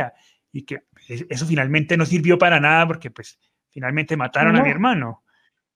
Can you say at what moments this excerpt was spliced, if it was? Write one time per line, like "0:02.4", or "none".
none